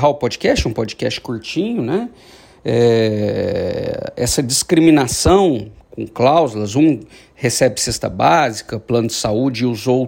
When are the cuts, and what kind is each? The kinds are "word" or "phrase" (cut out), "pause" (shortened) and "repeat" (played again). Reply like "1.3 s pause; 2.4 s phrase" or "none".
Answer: none